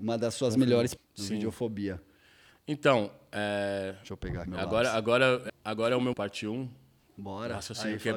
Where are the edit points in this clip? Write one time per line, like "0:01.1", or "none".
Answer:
0:01.0
0:04.5
0:05.5
0:06.1